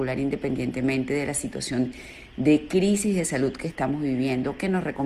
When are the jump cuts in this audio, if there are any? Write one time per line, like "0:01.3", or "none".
none